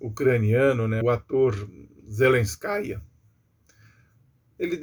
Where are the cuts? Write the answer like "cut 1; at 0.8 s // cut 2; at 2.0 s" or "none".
cut 1; at 1.0 s